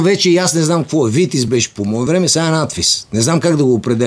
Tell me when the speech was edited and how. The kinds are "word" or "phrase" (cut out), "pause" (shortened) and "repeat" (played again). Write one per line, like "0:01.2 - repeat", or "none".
none